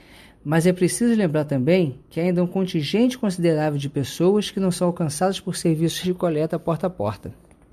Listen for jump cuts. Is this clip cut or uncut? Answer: cut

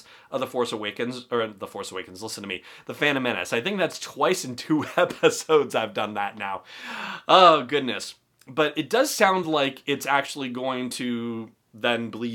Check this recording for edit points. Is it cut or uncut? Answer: uncut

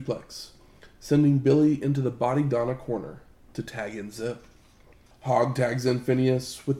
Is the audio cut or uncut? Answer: uncut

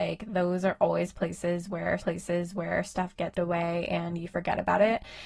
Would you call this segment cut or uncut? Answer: cut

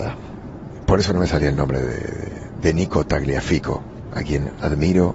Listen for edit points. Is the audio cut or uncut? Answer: uncut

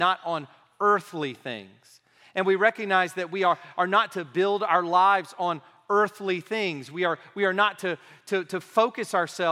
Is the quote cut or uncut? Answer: uncut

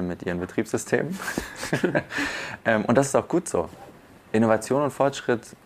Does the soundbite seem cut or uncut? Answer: uncut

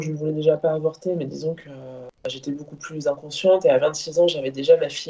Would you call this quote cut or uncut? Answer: cut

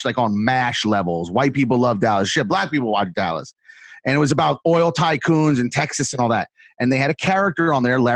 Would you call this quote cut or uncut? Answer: uncut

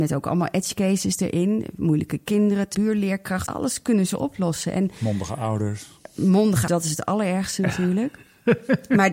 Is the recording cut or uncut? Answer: cut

